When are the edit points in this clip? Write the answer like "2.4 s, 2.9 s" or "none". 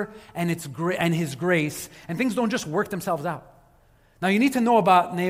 none